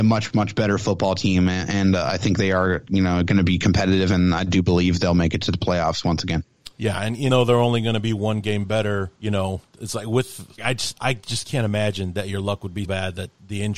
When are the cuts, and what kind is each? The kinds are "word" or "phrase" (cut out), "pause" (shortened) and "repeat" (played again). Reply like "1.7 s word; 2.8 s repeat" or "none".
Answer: 7.3 s word; 9.2 s pause; 10.6 s word; 12.8 s word